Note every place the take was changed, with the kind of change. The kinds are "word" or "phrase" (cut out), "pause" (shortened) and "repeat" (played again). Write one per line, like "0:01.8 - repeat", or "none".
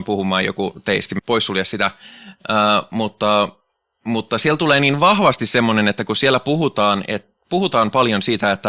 0:01.2 - phrase

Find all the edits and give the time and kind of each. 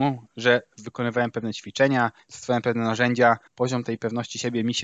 0:03.5 - pause

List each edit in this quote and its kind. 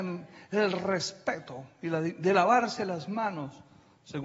none

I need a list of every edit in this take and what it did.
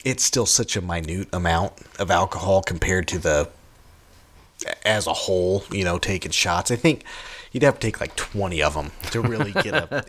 none

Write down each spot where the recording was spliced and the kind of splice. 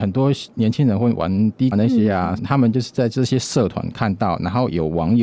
0:01.7 - word
0:02.4 - word

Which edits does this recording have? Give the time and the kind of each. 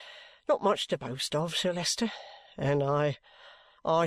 none

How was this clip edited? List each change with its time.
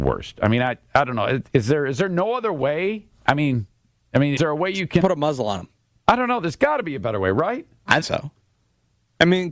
0:04.4 - word
0:05.0 - phrase
0:05.9 - pause
0:08.0 - word

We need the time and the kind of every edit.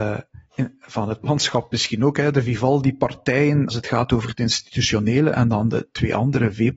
0:01.2 - word
0:03.7 - word

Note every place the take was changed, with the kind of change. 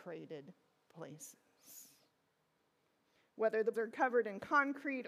0:03.7 - word

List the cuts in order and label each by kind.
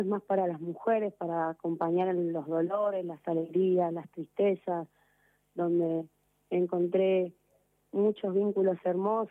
none

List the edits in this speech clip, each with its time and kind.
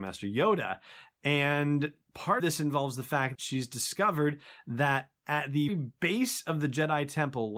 0:02.4 - word
0:03.3 - word
0:05.7 - word

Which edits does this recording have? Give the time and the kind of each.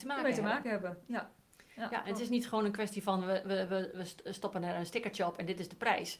none

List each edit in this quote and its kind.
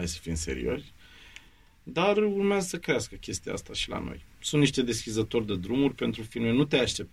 none

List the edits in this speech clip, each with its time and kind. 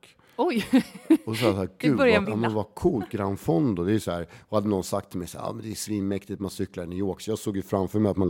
0:02.2 - phrase

